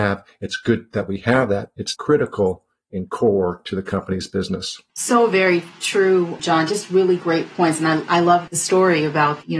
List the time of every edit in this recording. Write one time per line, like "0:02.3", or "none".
0:01.9
0:04.9